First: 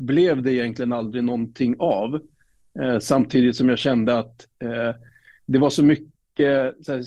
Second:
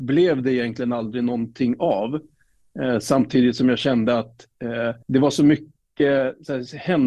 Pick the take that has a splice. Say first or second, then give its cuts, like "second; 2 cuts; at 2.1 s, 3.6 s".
second; 1 cut; at 5.0 s